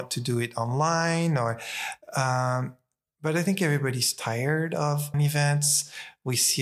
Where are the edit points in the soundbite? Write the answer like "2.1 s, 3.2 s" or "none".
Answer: 5.1 s